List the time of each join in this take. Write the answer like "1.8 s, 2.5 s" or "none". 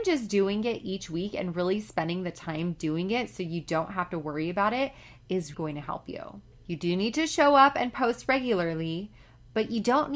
5.5 s